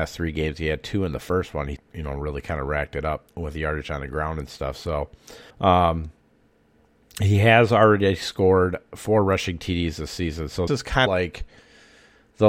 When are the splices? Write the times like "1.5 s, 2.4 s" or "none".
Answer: 1.8 s, 3.3 s, 5.5 s, 10.7 s, 11.1 s